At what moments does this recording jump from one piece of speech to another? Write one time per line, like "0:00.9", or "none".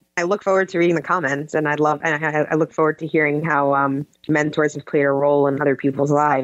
0:04.1

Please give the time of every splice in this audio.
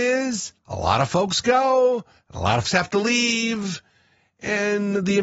0:02.6

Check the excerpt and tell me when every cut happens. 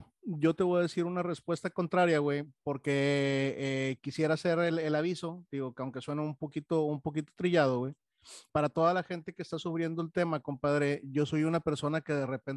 0:08.5

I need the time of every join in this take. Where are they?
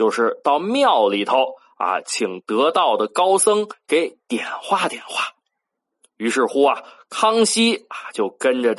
none

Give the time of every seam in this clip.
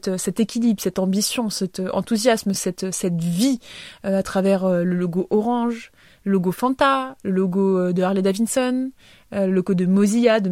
none

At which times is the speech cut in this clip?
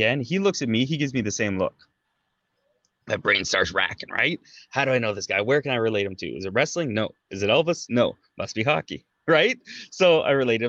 none

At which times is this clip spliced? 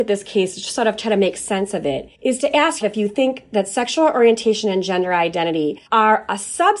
0:02.1
0:02.8
0:05.9

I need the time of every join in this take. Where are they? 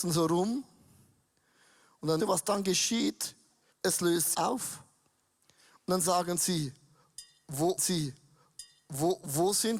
0:02.2
0:03.7
0:04.3
0:07.8

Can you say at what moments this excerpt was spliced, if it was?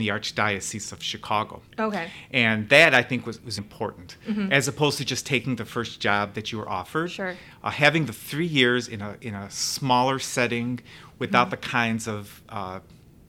0:03.6

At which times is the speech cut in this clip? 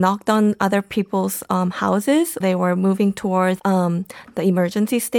0:02.4
0:03.6

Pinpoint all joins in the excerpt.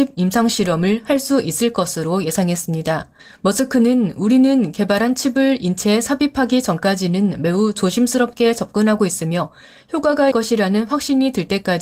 0:03.2
0:10.3

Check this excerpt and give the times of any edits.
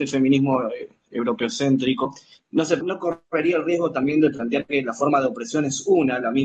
0:02.8

